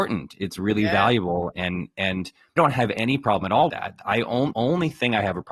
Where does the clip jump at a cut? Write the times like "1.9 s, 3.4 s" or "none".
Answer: 2.6 s, 3.7 s, 4.5 s